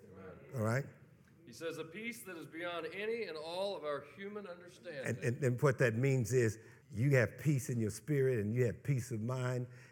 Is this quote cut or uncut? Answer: cut